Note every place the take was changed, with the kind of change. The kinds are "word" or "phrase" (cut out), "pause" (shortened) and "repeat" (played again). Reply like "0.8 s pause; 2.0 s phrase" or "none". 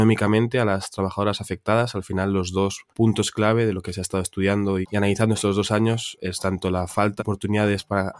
2.9 s pause; 4.8 s word; 7.2 s word